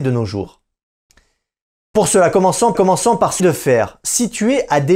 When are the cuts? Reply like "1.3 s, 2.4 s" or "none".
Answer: 2.7 s, 3.4 s